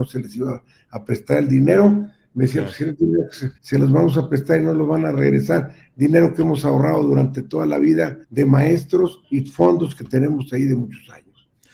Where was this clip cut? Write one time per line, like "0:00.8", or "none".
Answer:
0:03.6
0:08.2
0:09.2